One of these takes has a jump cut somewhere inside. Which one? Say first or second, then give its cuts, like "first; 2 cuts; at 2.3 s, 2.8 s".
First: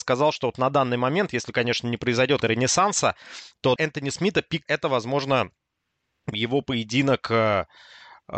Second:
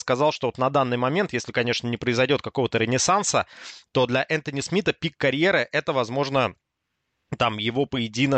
first; 4 cuts; at 2.4 s, 3.8 s, 4.7 s, 6.3 s